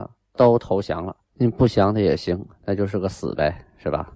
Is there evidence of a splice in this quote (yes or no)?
yes